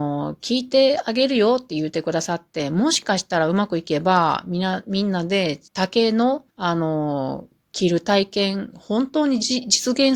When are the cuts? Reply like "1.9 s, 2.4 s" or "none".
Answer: 5.7 s, 6.5 s